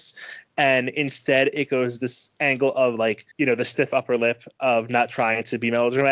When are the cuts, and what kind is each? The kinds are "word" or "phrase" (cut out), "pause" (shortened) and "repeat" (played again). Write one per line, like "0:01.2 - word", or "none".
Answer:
0:03.3 - pause

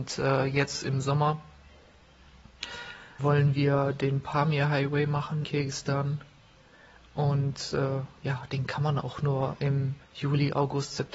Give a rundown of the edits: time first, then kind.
0:03.2 - word
0:05.4 - word
0:10.0 - pause

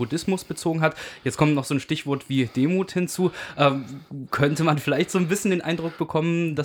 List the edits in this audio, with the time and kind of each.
none

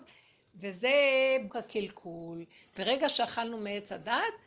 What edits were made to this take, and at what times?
0:01.5 - word

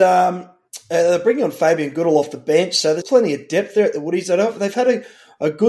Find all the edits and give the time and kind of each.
0:03.0 - word

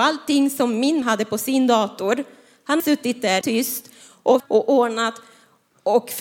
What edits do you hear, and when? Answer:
0:01.0 - word
0:02.8 - word
0:03.4 - word
0:04.4 - word

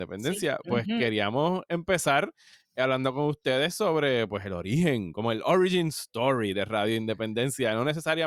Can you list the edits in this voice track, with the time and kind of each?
none

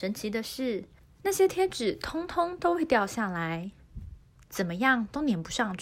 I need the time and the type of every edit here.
0:01.0 - pause

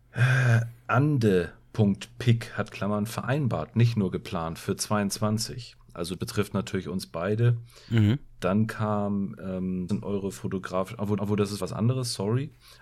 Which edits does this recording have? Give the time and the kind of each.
0:02.7 - phrase
0:06.2 - word
0:09.9 - word
0:11.2 - repeat
0:11.6 - word

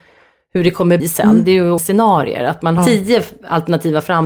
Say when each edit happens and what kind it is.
0:01.0 - word
0:01.8 - phrase
0:02.8 - word

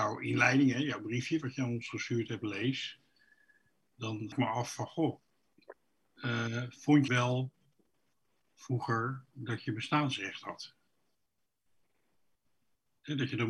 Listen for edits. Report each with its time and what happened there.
0:04.3 - word
0:07.1 - word

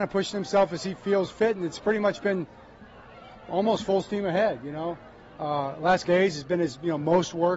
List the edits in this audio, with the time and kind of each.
0:06.0 - word

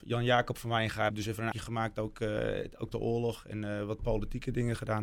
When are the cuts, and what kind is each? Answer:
0:01.1 - word
0:01.5 - word
0:02.9 - word

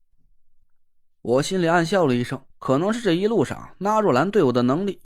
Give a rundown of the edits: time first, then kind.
0:02.5 - pause

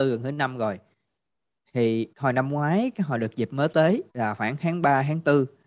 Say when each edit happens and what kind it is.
0:02.1 - pause
0:04.1 - pause

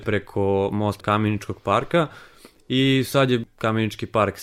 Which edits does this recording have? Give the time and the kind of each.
0:01.0 - word

